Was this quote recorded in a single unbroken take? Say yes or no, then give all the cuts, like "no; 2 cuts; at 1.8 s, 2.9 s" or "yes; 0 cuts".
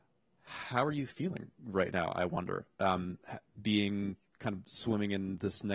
yes; 0 cuts